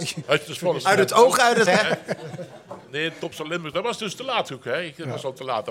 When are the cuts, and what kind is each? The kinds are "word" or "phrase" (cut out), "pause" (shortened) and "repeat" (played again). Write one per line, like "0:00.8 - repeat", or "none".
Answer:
0:01.7 - word